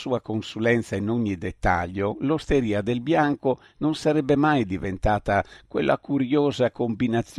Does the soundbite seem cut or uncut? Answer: uncut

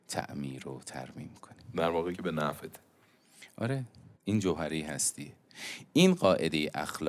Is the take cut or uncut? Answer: cut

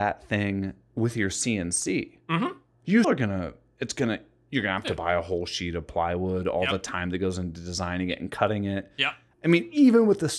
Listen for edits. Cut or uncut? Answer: cut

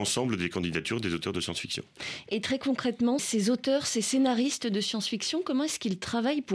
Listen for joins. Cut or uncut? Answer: cut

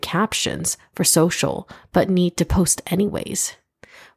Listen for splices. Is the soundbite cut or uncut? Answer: uncut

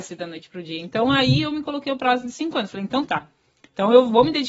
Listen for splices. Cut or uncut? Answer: uncut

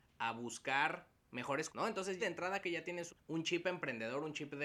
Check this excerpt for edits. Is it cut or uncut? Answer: cut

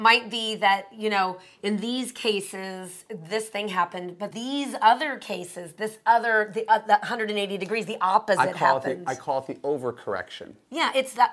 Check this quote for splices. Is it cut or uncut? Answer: cut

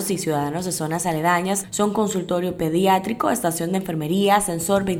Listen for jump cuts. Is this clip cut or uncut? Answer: uncut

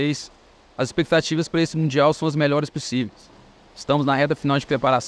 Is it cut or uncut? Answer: uncut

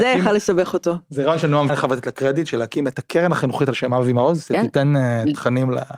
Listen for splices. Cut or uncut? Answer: cut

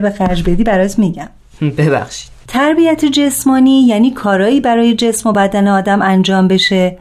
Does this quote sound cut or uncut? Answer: uncut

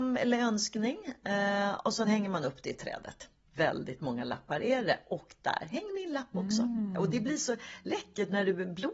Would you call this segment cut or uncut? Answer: uncut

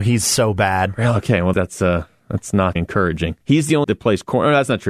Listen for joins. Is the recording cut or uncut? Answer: cut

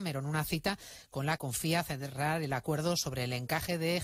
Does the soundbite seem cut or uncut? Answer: cut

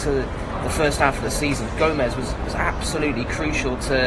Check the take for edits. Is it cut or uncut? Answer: uncut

